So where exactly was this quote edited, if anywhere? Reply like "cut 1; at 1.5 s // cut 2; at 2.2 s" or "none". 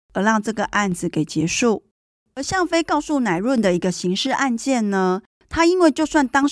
none